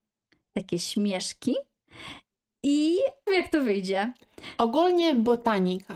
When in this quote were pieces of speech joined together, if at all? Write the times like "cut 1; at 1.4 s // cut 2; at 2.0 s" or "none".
cut 1; at 3.3 s